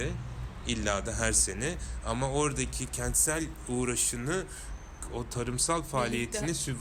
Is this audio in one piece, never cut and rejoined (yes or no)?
yes